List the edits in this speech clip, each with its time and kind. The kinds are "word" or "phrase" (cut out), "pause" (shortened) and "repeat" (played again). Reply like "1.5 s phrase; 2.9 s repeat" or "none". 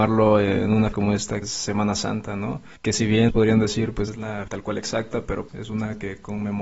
0.9 s word; 1.4 s word; 2.8 s pause; 3.3 s word; 4.1 s word; 4.5 s word; 5.5 s word